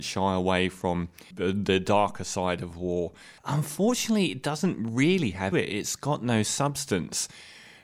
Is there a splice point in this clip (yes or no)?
yes